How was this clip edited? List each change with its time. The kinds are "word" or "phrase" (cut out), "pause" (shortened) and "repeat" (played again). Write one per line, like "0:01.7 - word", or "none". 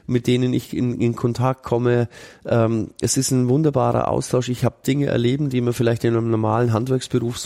0:04.8 - phrase